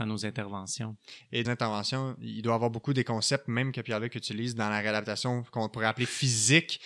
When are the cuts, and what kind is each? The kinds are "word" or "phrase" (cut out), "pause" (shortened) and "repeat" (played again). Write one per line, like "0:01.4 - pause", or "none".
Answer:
0:01.4 - phrase